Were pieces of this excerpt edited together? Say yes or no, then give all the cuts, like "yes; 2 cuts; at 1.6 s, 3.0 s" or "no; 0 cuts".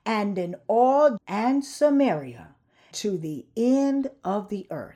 yes; 2 cuts; at 1.2 s, 2.9 s